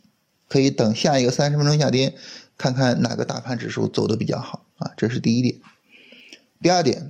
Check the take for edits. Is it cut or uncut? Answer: cut